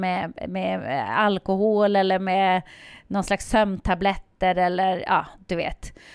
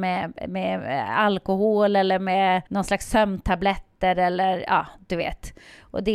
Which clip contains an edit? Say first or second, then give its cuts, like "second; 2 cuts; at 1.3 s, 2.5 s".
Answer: second; 1 cut; at 2.7 s